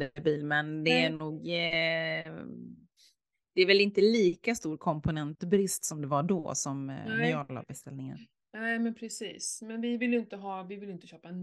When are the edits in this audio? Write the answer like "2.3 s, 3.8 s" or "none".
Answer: none